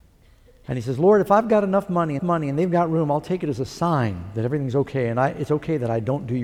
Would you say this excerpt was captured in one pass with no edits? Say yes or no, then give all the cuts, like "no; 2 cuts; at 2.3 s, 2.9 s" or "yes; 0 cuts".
no; 1 cut; at 2.2 s